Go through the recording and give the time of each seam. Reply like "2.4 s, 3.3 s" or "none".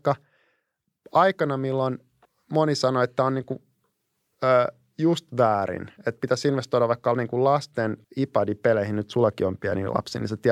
2.2 s, 8.0 s